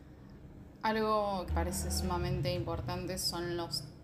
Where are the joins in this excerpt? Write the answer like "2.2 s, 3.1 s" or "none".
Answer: 1.5 s